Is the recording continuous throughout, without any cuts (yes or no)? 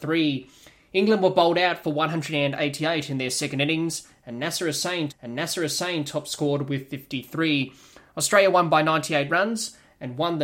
no